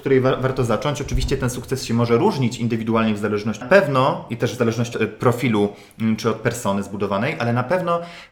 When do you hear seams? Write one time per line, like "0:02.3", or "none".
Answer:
0:03.6
0:04.9